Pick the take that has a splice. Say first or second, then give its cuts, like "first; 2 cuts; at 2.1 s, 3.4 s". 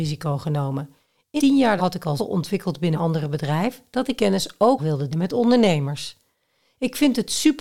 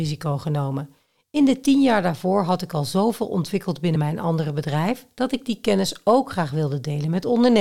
first; 7 cuts; at 1.4 s, 1.8 s, 2.2 s, 2.9 s, 4.2 s, 4.8 s, 5.1 s